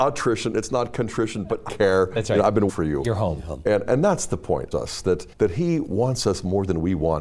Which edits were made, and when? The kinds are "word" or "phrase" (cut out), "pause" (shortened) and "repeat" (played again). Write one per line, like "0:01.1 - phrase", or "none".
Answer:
0:01.7 - word
0:02.7 - word
0:03.9 - word
0:04.7 - phrase
0:05.3 - pause